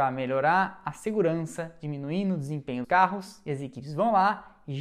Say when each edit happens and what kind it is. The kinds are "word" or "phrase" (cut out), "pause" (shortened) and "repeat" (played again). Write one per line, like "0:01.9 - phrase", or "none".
0:02.8 - word